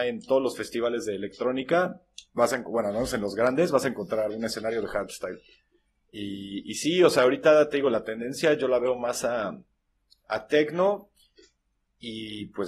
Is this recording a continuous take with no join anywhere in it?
yes; 0 cuts

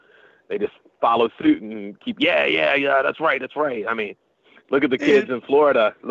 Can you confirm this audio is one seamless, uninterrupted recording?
yes; 0 cuts

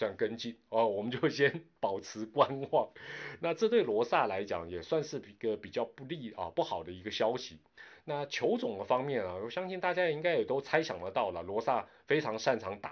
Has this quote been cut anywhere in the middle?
no; 0 cuts

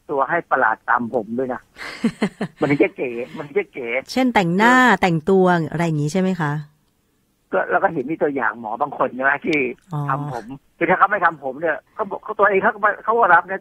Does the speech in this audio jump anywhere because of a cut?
yes; 1 cut; at 11.9 s

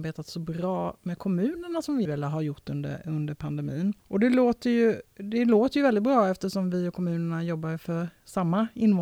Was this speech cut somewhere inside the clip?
yes; 2 cuts; at 2.1 s, 4.0 s

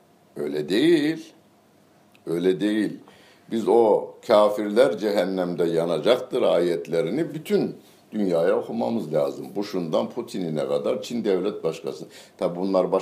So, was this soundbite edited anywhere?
no; 0 cuts

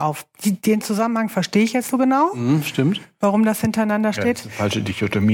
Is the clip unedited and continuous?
no; 1 cut; at 1.9 s

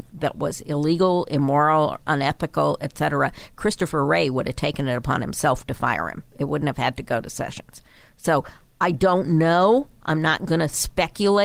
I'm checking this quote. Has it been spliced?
no; 0 cuts

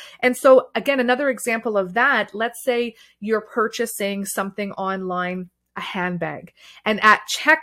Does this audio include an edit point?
no; 0 cuts

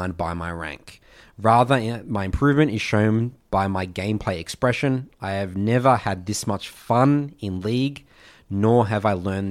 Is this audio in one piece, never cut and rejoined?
yes; 0 cuts

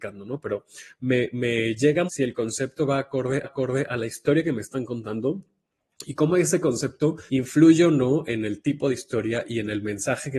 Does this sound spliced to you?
yes; 3 cuts; at 2.1 s, 3.4 s, 7.3 s

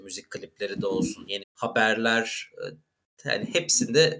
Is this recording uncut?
no; 1 cut; at 1.4 s

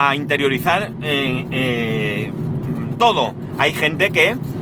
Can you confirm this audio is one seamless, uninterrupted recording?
no; 1 cut; at 2.9 s

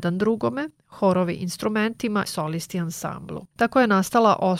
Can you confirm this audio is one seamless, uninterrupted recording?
no; 2 cuts; at 2.3 s, 3.5 s

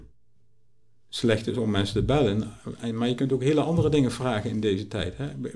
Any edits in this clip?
no; 0 cuts

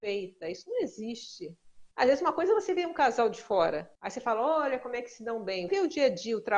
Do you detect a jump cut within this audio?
yes; 3 cuts; at 1.9 s, 4.0 s, 5.7 s

